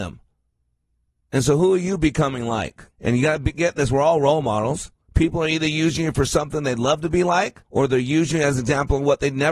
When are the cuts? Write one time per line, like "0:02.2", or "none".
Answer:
0:02.9
0:05.0
0:07.6